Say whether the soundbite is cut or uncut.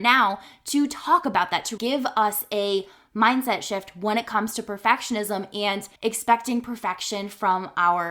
cut